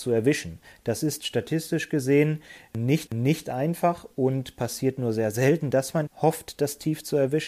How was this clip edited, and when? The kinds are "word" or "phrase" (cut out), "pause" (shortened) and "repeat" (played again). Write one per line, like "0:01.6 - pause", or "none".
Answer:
0:03.1 - repeat
0:06.1 - word